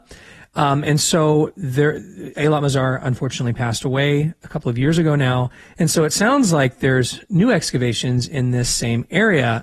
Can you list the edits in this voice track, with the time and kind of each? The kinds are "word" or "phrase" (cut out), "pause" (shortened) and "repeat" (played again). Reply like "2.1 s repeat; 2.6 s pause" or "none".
none